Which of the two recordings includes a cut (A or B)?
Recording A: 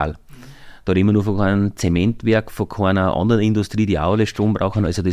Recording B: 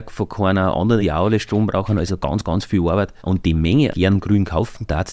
B